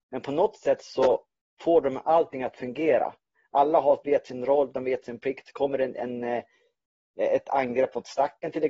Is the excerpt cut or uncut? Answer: uncut